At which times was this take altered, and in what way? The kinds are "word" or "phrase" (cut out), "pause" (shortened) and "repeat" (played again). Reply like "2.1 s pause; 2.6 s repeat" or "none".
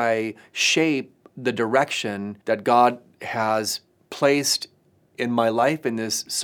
2.4 s pause; 3.9 s word